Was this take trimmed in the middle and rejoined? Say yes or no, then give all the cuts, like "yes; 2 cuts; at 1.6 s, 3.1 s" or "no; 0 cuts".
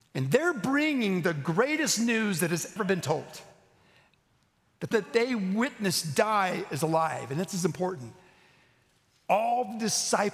yes; 2 cuts; at 2.8 s, 4.9 s